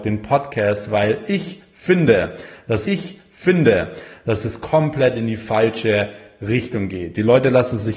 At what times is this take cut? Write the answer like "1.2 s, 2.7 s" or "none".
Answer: 2.8 s